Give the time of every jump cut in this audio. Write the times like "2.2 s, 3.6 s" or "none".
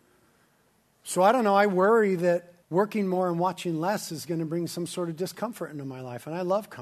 2.6 s

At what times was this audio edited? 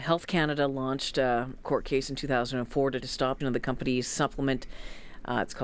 1.6 s, 3.0 s, 3.4 s

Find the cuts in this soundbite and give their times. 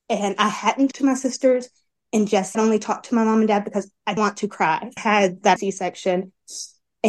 0.9 s, 2.5 s, 4.2 s, 5.0 s, 5.6 s

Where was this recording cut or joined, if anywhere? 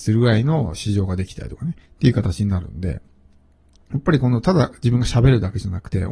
1.8 s

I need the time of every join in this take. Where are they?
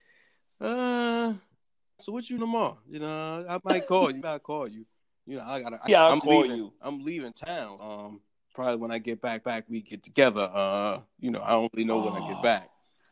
2.0 s, 2.4 s, 4.2 s, 5.9 s, 7.8 s, 9.4 s

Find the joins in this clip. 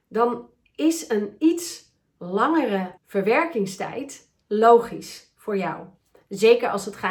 3.0 s

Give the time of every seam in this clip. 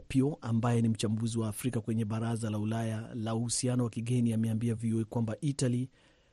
none

